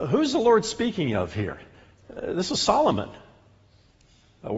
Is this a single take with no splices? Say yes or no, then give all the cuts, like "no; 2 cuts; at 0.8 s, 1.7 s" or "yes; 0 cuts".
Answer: yes; 0 cuts